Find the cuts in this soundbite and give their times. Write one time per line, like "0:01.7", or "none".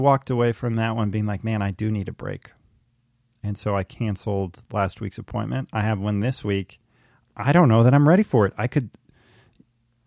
none